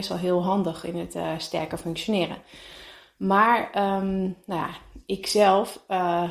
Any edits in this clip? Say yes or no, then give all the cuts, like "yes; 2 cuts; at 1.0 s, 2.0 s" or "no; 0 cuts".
no; 0 cuts